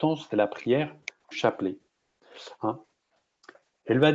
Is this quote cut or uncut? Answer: cut